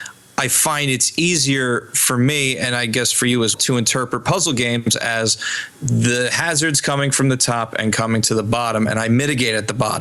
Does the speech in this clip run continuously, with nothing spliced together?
no; 1 cut; at 3.5 s

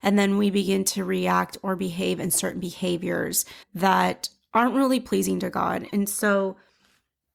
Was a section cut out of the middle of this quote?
yes; 1 cut; at 3.6 s

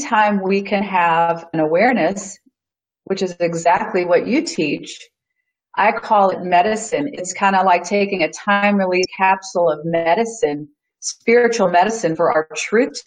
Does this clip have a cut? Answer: no; 0 cuts

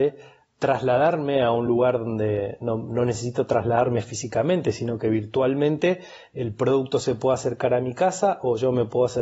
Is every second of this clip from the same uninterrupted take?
yes; 0 cuts

